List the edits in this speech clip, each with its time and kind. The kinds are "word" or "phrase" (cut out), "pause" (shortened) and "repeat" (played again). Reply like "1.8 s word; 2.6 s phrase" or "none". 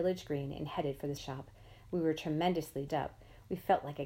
1.2 s word; 2.9 s word